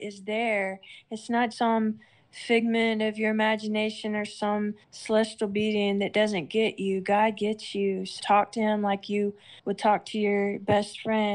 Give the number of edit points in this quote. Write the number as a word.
four